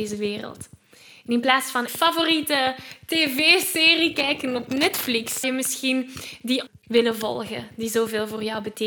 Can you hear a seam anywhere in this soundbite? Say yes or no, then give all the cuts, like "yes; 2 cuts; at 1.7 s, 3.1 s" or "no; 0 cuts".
yes; 3 cuts; at 1.9 s, 5.4 s, 6.7 s